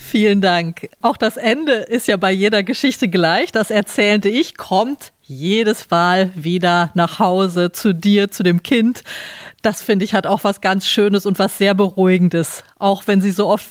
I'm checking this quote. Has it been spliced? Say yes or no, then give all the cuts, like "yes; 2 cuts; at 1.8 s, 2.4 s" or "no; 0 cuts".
no; 0 cuts